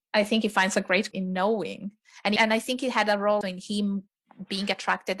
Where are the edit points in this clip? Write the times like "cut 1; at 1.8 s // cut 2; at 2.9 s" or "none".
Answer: cut 1; at 1.1 s // cut 2; at 2.4 s // cut 3; at 3.4 s